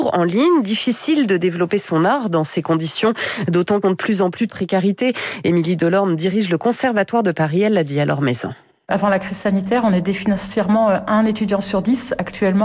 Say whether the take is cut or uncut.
cut